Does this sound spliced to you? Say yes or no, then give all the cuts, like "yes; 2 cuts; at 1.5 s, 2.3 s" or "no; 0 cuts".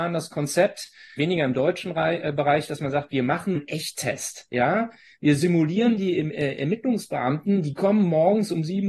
yes; 2 cuts; at 1.2 s, 3.5 s